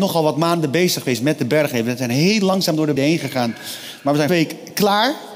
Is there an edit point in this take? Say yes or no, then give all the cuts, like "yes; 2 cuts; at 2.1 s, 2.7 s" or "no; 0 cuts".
yes; 2 cuts; at 3.0 s, 4.3 s